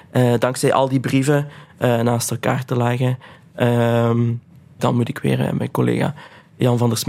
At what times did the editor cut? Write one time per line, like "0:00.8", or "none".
0:04.8